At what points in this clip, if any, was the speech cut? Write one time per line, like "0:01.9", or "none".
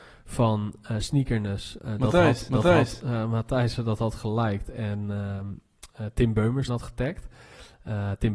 0:01.8
0:02.5
0:06.7